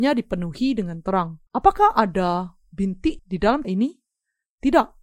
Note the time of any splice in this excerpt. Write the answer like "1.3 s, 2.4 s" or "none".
1.5 s, 3.2 s, 3.6 s